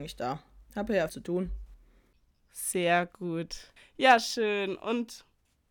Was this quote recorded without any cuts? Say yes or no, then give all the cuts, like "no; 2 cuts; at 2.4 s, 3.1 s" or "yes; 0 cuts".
no; 2 cuts; at 1.1 s, 3.8 s